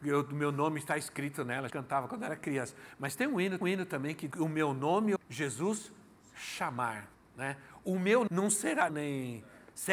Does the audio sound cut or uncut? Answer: cut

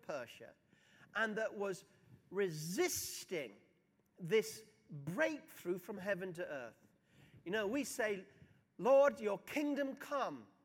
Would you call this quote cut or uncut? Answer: uncut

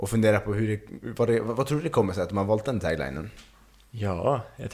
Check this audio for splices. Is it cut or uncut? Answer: uncut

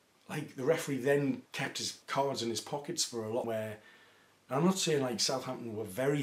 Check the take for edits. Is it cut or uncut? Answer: cut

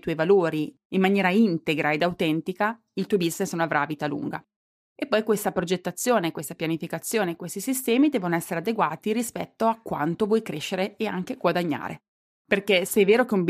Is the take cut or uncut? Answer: uncut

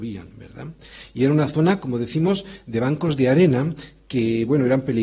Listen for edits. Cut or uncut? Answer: uncut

